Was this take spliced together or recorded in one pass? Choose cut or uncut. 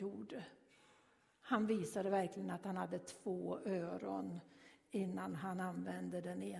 uncut